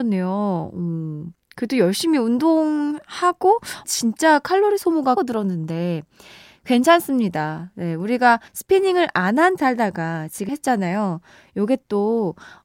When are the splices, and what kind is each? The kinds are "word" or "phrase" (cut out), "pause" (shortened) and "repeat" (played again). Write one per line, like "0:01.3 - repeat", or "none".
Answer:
0:03.8 - phrase
0:05.2 - word
0:08.5 - pause
0:09.6 - word
0:10.5 - phrase